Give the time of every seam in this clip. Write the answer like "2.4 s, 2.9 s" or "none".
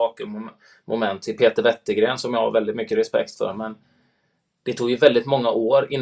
none